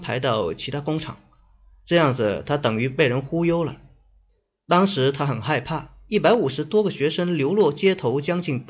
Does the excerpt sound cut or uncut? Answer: uncut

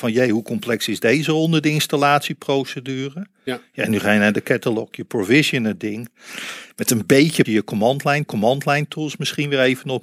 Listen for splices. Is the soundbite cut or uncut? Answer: cut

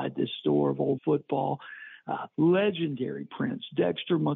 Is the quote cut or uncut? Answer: cut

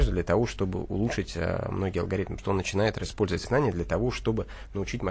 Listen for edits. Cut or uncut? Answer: cut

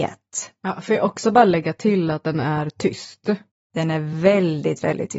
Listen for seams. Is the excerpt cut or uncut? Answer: uncut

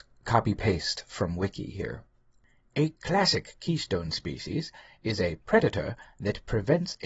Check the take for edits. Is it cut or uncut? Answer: uncut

